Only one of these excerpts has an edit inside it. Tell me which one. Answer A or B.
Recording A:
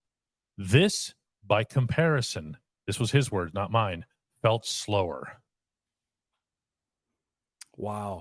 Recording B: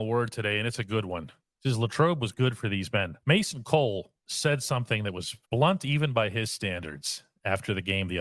B